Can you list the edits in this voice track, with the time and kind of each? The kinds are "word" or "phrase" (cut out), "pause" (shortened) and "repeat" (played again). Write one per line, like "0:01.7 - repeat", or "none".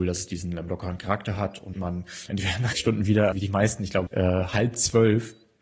0:01.7 - phrase
0:02.3 - word
0:02.7 - word
0:03.3 - word
0:04.1 - word